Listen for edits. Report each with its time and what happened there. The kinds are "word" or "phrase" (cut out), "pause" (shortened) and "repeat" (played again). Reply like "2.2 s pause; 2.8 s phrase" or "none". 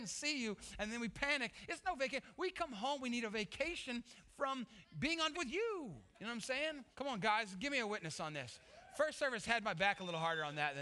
5.3 s word; 6.9 s pause